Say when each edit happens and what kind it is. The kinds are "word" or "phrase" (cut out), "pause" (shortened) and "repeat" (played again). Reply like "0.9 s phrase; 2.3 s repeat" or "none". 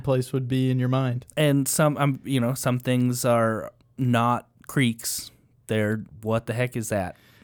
none

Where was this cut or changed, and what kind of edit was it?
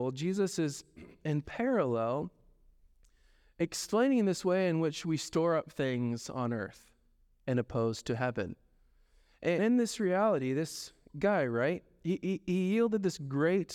9.6 s word

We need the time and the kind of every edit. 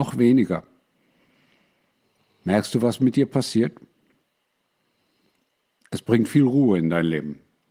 none

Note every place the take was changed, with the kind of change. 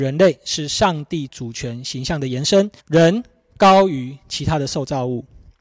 2.8 s pause

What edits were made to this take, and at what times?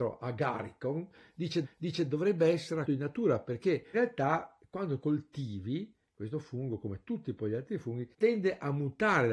1.6 s repeat; 2.8 s word; 3.9 s word; 5.0 s phrase; 8.1 s pause

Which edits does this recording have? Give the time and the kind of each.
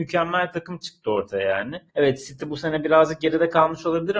1.9 s pause

